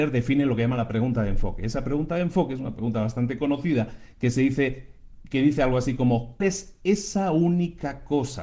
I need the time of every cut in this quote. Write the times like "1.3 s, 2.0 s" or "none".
6.4 s